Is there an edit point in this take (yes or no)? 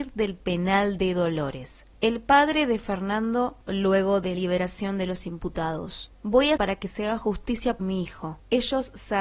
yes